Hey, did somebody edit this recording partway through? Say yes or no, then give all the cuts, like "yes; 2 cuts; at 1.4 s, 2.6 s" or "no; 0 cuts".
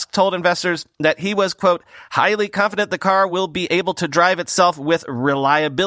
no; 0 cuts